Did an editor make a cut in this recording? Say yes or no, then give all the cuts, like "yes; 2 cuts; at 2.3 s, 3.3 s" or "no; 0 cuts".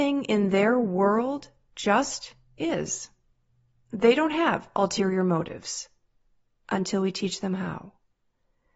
no; 0 cuts